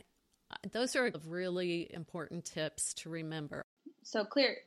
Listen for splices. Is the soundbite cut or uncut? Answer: cut